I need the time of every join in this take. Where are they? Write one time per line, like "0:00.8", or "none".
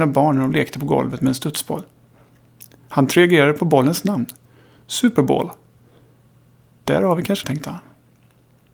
0:07.4